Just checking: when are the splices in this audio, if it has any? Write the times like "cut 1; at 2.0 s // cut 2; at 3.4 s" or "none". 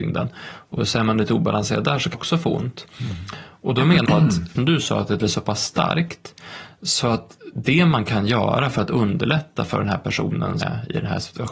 cut 1; at 2.1 s // cut 2; at 4.0 s // cut 3; at 4.6 s // cut 4; at 5.2 s // cut 5; at 10.6 s